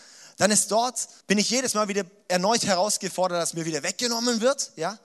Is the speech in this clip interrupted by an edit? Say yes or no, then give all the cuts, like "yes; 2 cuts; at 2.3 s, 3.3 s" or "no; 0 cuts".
yes; 1 cut; at 1.2 s